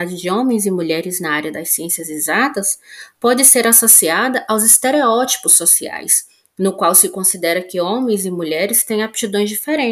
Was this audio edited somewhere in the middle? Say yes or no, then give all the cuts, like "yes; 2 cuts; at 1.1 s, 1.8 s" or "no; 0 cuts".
no; 0 cuts